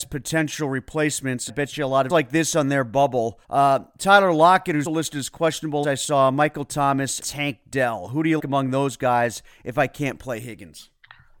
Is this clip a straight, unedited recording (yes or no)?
no